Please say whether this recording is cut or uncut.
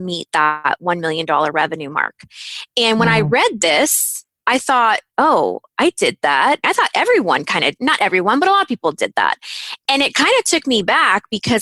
cut